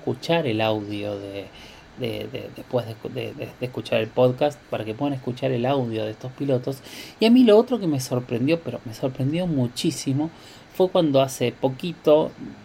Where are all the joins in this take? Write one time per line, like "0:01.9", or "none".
0:03.3